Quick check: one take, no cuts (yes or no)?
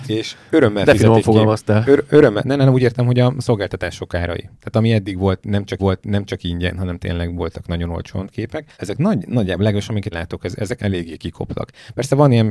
no